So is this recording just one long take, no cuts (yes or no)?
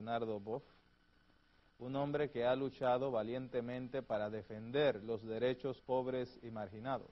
no